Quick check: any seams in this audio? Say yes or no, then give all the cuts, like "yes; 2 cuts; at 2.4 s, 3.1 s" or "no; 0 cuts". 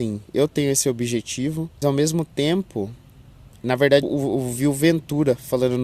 yes; 3 cuts; at 1.8 s, 3.6 s, 4.0 s